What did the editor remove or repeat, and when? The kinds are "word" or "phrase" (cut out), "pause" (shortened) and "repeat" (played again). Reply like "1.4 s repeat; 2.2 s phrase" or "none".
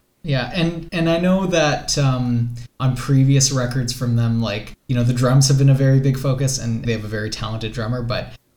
2.7 s pause; 4.8 s pause; 6.8 s phrase